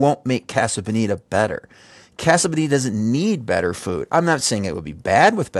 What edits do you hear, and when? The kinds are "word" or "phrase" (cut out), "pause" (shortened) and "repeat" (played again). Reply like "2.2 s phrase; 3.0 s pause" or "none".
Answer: none